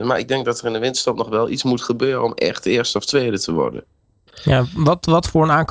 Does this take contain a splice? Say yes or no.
no